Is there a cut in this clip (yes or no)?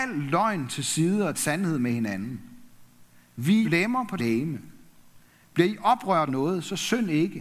yes